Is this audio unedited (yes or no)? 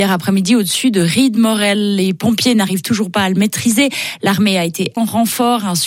no